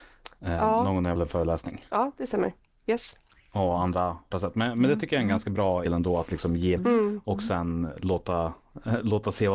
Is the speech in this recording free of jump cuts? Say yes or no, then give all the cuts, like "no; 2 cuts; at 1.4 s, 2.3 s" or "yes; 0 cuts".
no; 4 cuts; at 1.2 s, 4.3 s, 5.9 s, 6.8 s